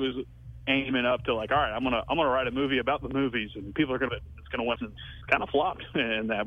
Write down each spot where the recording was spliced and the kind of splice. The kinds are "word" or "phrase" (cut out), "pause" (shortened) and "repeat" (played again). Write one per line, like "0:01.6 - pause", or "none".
0:04.1 - word
0:04.8 - phrase
0:05.2 - pause